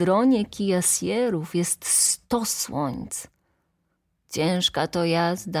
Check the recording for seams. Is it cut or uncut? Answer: uncut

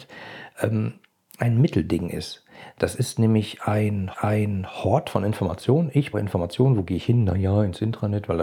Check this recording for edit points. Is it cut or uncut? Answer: cut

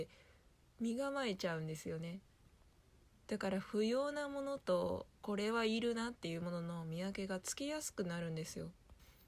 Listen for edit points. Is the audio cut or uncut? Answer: uncut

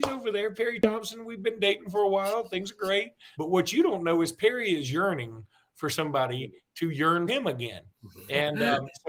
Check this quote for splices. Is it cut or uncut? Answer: cut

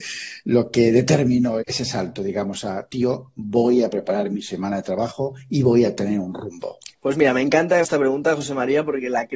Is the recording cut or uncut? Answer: cut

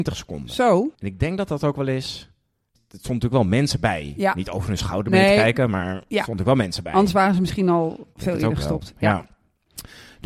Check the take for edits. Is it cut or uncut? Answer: cut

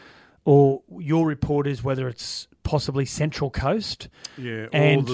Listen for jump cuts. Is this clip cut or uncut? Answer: uncut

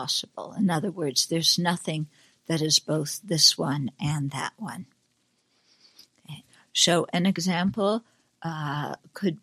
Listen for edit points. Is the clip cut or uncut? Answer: uncut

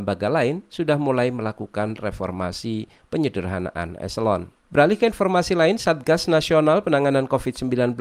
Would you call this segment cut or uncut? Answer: cut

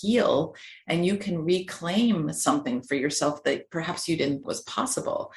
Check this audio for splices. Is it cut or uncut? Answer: cut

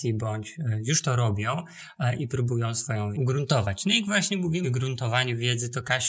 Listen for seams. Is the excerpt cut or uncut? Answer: cut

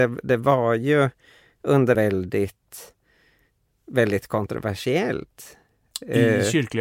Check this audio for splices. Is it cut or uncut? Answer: cut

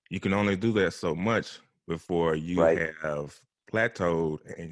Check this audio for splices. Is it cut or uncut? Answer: uncut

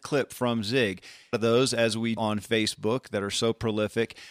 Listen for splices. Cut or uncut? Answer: cut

